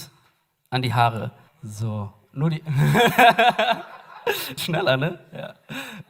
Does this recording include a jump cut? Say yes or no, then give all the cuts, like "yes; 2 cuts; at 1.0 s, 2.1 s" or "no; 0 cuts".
yes; 2 cuts; at 1.5 s, 4.6 s